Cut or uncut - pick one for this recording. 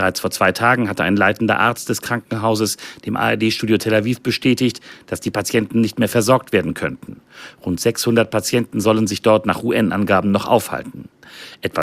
uncut